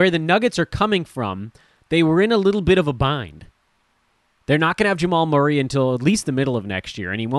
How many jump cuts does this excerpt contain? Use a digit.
0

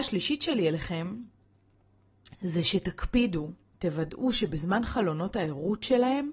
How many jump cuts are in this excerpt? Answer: 0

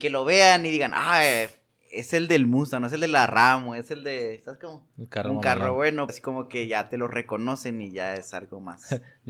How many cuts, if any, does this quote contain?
1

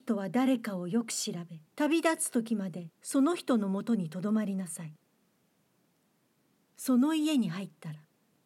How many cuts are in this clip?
2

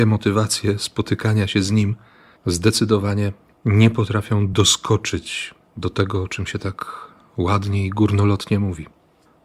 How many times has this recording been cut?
0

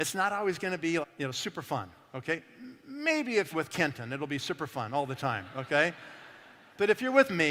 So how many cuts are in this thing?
2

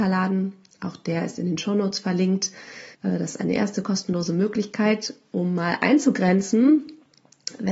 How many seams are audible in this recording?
1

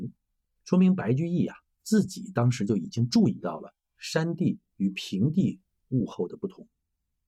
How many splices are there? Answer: 0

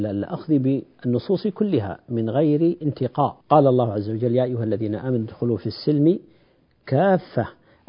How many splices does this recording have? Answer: 1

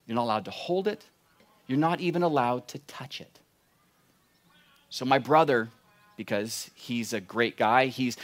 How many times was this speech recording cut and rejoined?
0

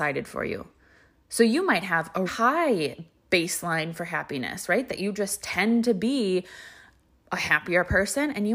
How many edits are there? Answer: 1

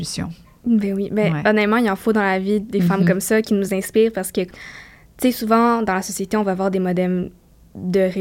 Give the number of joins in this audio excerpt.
0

